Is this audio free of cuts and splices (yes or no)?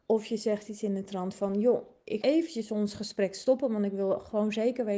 no